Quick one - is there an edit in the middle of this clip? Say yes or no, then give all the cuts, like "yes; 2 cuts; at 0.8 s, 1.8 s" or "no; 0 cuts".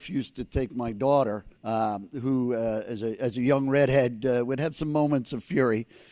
yes; 1 cut; at 1.6 s